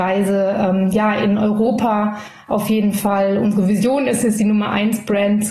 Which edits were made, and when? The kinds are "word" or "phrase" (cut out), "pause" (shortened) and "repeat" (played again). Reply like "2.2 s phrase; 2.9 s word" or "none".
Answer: none